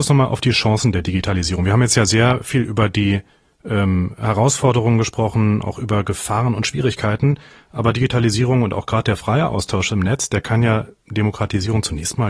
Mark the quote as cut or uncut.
uncut